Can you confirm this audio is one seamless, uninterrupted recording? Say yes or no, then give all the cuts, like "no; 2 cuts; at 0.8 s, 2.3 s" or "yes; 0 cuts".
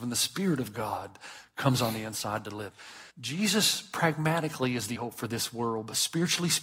no; 2 cuts; at 3.1 s, 4.9 s